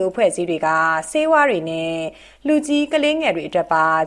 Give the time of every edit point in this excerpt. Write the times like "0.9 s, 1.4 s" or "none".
none